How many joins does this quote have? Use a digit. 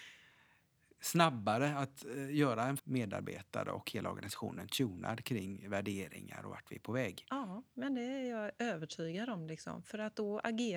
1